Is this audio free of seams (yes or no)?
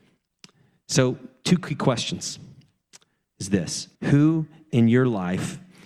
no